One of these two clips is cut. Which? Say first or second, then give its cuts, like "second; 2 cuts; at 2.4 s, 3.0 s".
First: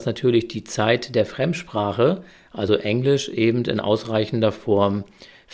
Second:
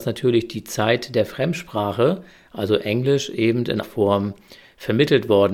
second; 1 cut; at 3.8 s